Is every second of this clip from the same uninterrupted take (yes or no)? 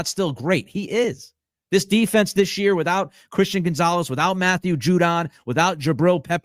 yes